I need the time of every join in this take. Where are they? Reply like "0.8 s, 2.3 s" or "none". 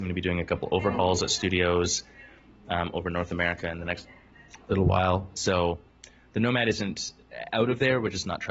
none

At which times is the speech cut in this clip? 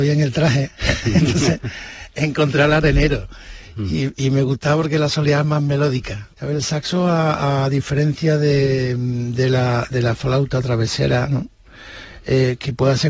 6.3 s

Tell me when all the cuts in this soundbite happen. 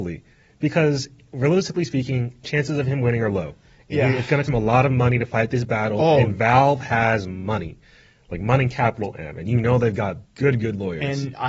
4.5 s, 10.2 s

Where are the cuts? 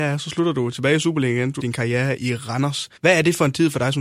1.6 s, 2.2 s, 3.0 s

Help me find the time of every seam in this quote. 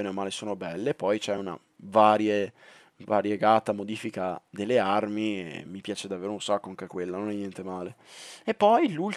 none

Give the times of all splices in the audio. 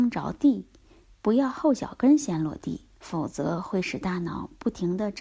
2.9 s

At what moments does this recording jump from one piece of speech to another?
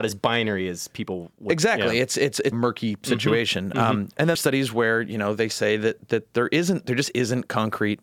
2.5 s, 4.3 s

